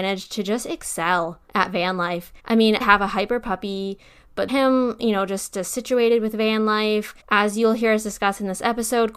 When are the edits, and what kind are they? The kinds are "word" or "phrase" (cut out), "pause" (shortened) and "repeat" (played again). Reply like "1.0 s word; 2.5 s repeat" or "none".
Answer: 1.5 s pause; 2.4 s pause; 2.8 s phrase; 4.5 s phrase; 7.2 s pause